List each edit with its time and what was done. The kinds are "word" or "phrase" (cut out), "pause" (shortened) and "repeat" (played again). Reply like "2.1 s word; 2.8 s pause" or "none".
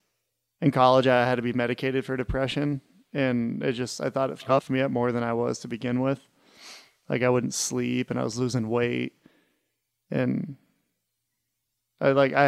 none